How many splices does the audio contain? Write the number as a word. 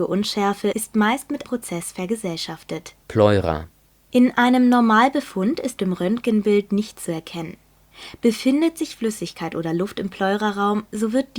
three